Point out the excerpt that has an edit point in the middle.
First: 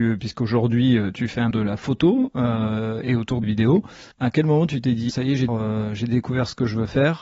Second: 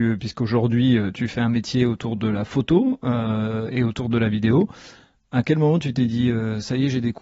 first; 5 cuts; at 1.5 s, 3.4 s, 4.1 s, 5.1 s, 5.5 s

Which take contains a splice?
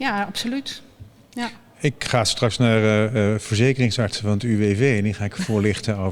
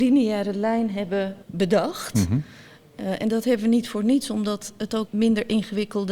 second; 2 cuts; at 1.4 s, 5.1 s

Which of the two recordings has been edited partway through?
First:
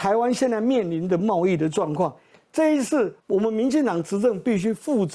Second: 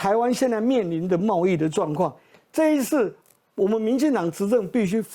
first; 1 cut; at 3.2 s

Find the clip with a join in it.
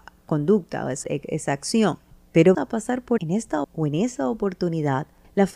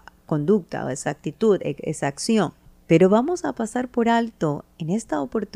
first; 4 cuts; at 1.0 s, 2.5 s, 3.2 s, 3.6 s

